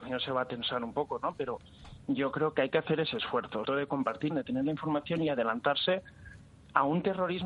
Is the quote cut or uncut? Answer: cut